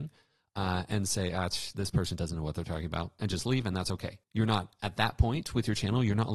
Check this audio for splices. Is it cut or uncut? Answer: cut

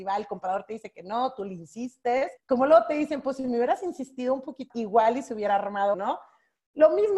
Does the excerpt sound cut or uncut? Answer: cut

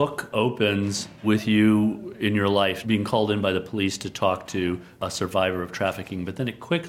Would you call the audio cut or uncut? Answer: cut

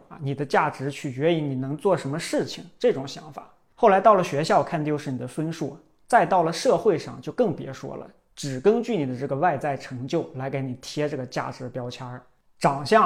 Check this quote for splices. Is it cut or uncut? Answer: uncut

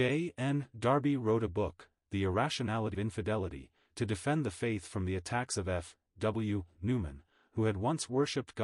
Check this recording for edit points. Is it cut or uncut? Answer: cut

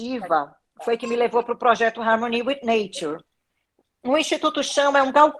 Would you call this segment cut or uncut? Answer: uncut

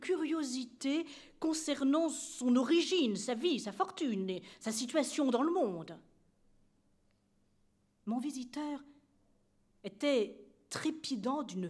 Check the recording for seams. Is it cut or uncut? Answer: uncut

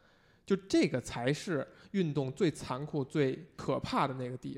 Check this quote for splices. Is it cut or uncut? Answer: uncut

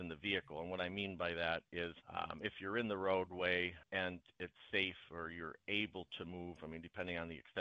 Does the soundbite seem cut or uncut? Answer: cut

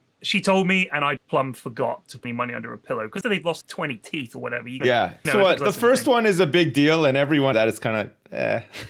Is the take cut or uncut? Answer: cut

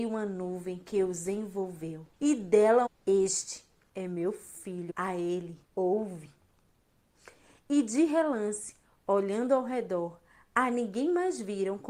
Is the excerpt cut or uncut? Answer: cut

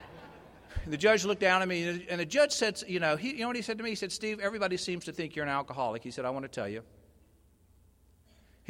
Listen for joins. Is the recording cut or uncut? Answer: uncut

